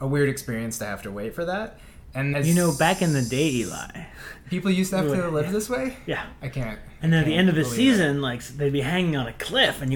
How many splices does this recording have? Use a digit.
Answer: 1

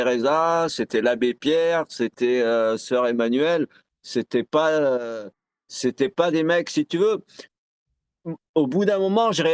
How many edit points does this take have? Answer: 0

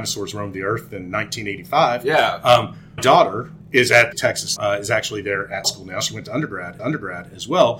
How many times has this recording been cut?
6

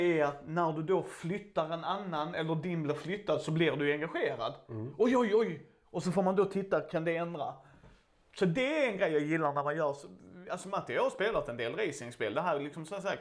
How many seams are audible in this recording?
0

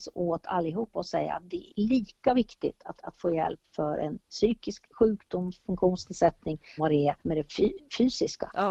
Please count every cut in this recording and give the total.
5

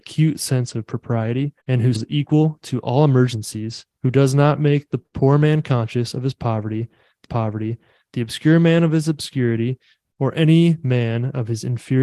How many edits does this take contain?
4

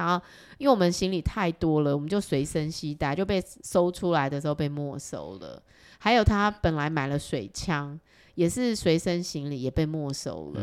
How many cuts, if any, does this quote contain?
0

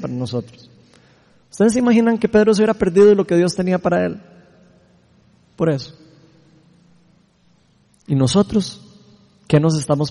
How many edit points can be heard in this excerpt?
0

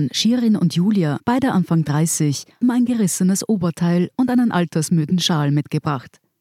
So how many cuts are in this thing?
2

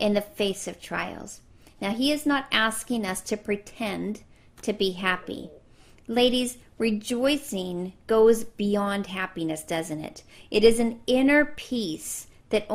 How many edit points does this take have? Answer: 0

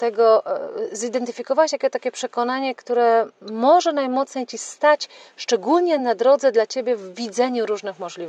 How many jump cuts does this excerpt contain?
0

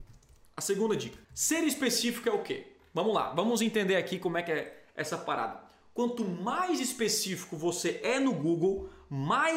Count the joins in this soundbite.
1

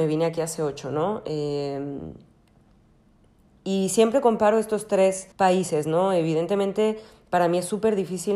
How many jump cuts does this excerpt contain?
1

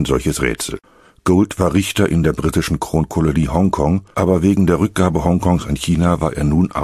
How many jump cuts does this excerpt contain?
1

